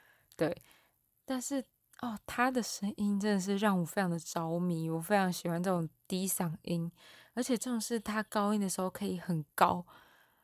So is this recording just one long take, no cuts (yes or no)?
yes